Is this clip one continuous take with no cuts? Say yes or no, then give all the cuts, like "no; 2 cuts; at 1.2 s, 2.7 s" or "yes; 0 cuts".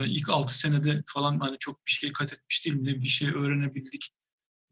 yes; 0 cuts